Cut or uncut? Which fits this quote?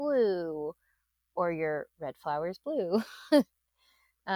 uncut